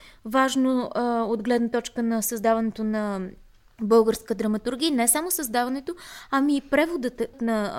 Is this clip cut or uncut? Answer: uncut